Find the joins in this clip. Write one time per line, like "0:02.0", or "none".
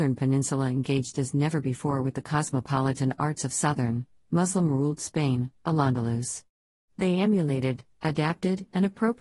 none